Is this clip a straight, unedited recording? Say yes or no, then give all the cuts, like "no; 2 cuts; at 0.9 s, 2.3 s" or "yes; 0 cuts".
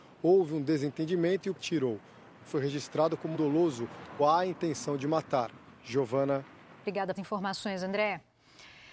no; 5 cuts; at 1.6 s, 2.4 s, 3.3 s, 4.2 s, 7.2 s